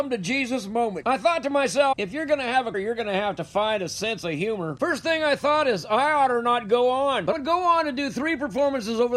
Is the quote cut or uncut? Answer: cut